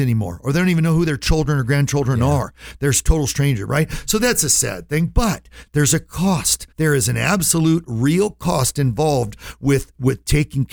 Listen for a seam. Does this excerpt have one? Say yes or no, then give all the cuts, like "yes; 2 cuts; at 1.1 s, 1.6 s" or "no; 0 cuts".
yes; 1 cut; at 6.7 s